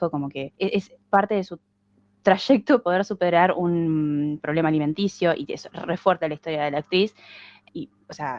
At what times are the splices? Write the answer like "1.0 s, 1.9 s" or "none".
1.0 s, 2.8 s